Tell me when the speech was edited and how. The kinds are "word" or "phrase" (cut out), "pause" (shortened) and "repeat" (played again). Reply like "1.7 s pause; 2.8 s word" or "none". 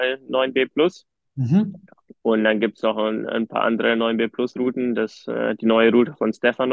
none